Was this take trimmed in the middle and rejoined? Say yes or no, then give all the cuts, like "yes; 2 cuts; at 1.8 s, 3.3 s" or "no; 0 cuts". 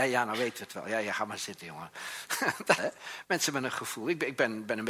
yes; 1 cut; at 2.8 s